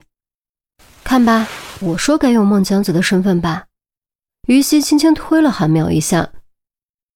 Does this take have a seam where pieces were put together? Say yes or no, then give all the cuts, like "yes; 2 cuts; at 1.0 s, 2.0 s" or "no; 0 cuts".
no; 0 cuts